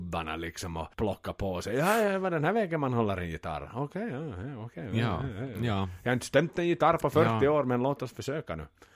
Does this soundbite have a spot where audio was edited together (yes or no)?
yes